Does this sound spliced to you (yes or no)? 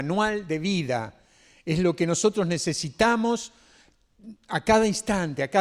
no